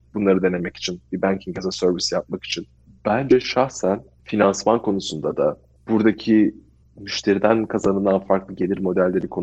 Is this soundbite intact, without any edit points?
yes; 0 cuts

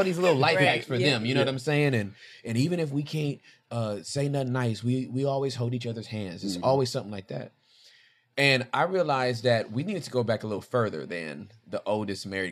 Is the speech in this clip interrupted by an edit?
no; 0 cuts

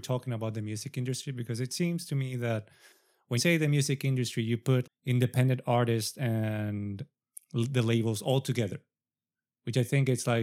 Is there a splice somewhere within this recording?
yes; 2 cuts; at 3.4 s, 4.8 s

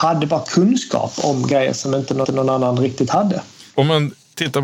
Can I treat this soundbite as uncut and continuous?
no; 2 cuts; at 2.2 s, 3.7 s

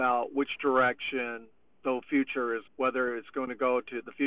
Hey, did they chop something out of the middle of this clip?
yes; 2 cuts; at 1.6 s, 2.7 s

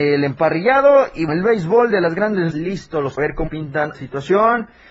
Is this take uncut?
no; 5 cuts; at 1.3 s, 2.5 s, 3.2 s, 3.5 s, 3.9 s

